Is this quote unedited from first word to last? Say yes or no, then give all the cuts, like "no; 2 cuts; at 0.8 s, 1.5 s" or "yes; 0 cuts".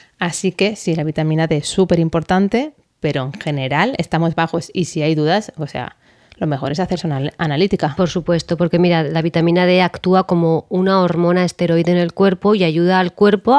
yes; 0 cuts